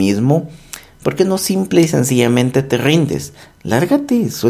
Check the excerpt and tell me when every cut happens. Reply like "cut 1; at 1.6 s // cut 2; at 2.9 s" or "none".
none